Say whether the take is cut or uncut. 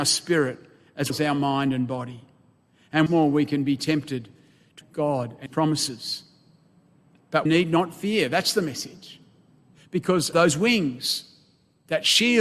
cut